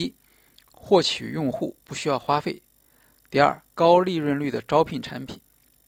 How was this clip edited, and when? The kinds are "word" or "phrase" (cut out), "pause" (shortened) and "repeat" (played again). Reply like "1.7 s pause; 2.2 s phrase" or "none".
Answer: 3.7 s pause